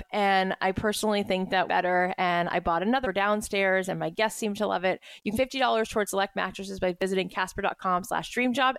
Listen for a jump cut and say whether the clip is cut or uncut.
cut